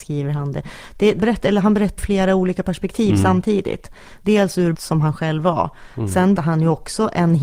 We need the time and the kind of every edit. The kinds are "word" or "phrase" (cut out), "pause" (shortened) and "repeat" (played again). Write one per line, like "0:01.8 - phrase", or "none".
0:01.2 - phrase
0:02.0 - word
0:04.7 - word
0:06.3 - word